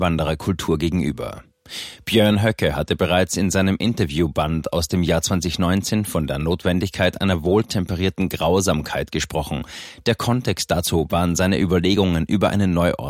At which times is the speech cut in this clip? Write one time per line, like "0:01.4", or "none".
none